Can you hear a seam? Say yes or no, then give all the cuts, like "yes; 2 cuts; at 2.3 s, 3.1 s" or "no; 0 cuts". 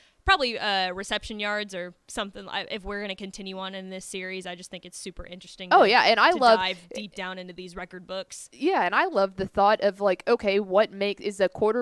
yes; 1 cut; at 2.0 s